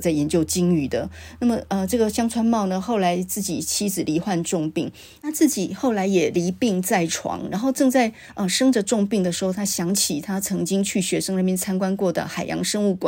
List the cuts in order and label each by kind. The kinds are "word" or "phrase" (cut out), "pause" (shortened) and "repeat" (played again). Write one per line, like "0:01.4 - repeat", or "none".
none